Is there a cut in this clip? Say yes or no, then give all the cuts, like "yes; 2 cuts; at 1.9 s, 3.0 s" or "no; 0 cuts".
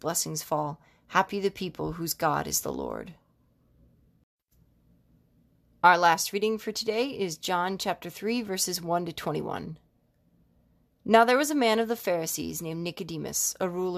no; 0 cuts